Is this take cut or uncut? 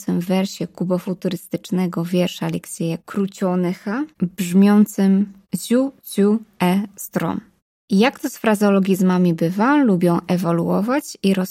uncut